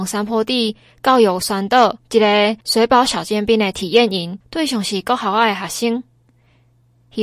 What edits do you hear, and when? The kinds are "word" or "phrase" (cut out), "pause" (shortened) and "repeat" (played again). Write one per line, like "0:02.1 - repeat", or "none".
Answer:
0:02.0 - pause
0:02.6 - pause